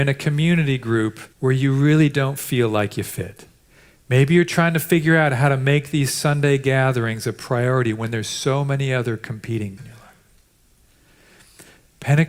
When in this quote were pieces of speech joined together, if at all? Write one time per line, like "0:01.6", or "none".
0:01.3
0:03.6
0:09.8